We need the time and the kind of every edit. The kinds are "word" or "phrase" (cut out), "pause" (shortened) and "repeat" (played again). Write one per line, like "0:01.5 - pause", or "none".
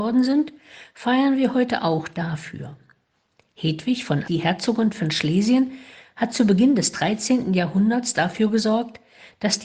0:04.2 - word